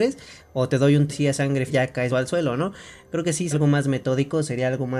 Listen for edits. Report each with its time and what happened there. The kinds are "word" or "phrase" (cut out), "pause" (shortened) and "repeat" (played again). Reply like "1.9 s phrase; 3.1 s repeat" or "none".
1.1 s word; 1.7 s word; 2.1 s word; 3.5 s word